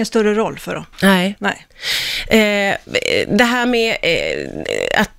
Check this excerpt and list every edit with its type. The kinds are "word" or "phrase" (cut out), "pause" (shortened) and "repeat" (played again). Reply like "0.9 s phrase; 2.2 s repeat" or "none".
0.9 s pause